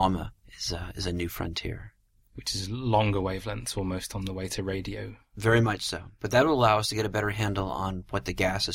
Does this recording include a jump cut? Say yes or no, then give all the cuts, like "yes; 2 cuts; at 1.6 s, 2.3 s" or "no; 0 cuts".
no; 0 cuts